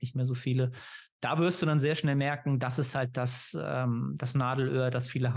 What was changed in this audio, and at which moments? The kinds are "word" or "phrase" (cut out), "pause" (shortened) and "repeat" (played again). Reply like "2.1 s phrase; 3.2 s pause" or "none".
none